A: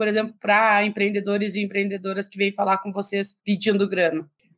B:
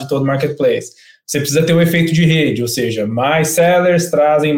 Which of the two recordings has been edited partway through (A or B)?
A